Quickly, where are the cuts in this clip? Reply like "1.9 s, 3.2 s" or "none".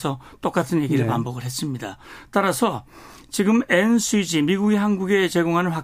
none